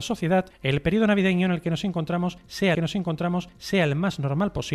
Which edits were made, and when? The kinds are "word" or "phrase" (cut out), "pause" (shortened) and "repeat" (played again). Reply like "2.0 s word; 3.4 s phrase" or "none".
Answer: 2.7 s repeat